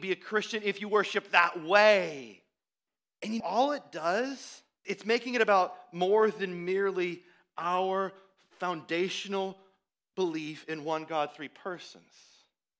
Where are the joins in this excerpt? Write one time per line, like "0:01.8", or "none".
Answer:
0:02.9
0:03.4
0:04.8